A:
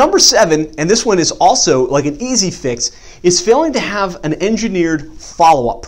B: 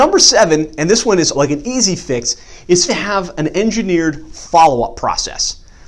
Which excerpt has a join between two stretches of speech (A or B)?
B